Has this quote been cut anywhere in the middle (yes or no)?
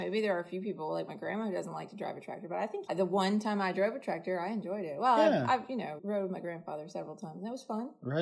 yes